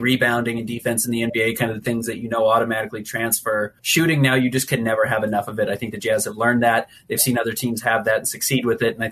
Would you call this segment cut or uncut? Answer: cut